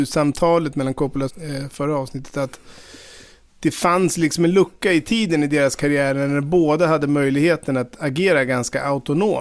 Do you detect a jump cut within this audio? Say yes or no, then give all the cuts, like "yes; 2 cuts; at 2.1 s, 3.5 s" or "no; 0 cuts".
yes; 1 cut; at 1.3 s